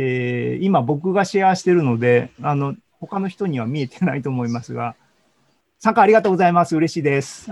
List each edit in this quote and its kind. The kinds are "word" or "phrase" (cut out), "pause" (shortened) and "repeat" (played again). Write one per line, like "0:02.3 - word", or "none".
0:02.4 - word

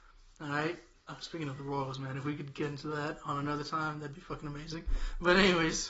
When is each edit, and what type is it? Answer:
none

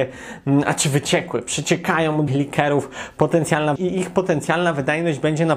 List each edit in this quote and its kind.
0:02.3 - word
0:03.8 - word

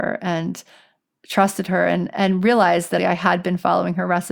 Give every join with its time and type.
0:03.0 - word

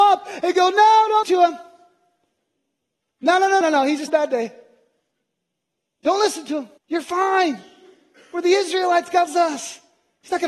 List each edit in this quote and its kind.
0:01.2 - word
0:03.6 - phrase
0:04.1 - word
0:06.8 - pause
0:09.3 - word

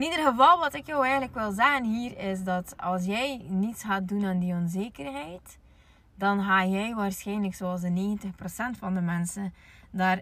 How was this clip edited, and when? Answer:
none

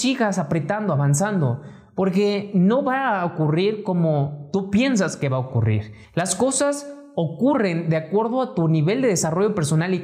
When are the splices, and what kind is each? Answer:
0:06.0 - pause

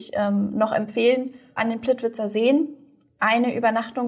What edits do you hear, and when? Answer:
0:01.6 - word

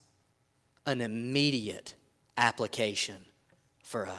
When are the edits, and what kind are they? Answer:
none

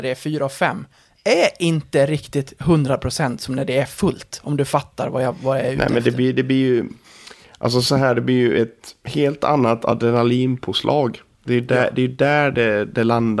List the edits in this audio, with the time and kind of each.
none

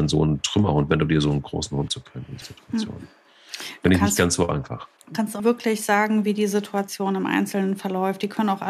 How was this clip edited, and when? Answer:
0:01.9 - phrase
0:02.4 - word
0:05.0 - pause
0:05.4 - word

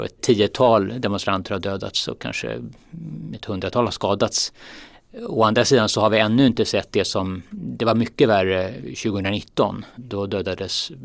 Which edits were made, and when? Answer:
none

